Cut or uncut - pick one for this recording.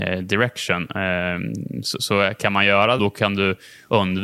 cut